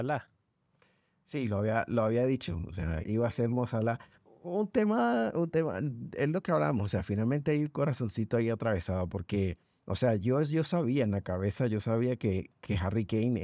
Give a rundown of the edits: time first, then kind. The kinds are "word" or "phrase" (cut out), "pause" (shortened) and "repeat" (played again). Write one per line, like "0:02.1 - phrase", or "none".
0:03.0 - word